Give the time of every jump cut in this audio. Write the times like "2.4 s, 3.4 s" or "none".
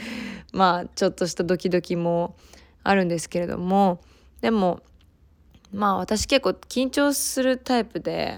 none